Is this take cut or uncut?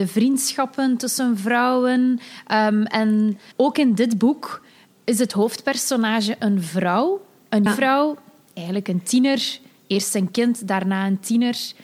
cut